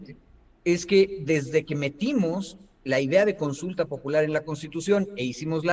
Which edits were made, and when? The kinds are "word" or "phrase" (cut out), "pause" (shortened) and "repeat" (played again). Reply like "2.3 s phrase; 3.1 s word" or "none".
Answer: none